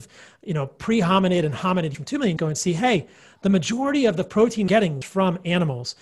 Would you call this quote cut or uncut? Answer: cut